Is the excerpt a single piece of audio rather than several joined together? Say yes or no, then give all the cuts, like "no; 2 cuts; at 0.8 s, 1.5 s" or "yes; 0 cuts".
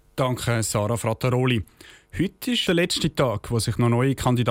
no; 1 cut; at 2.7 s